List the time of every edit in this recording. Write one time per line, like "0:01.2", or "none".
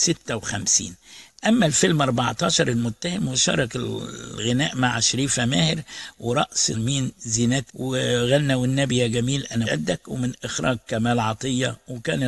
0:06.7
0:07.7
0:09.6